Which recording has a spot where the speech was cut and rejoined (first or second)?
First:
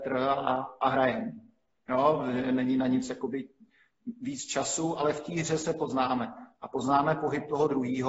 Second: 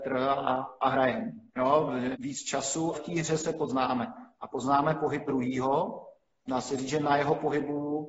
second